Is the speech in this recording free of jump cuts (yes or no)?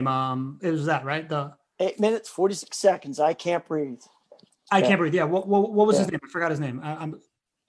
yes